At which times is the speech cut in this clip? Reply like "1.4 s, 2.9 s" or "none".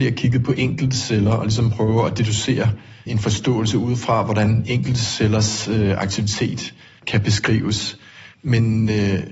3.1 s